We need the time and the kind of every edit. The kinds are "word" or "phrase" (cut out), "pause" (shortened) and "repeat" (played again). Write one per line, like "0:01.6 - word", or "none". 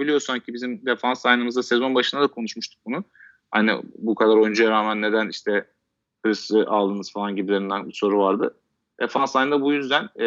none